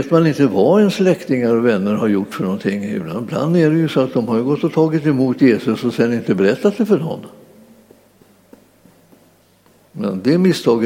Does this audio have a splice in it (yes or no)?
no